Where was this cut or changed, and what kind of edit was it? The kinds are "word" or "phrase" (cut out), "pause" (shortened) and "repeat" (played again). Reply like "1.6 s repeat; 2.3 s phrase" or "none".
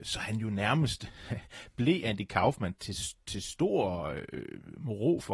2.8 s word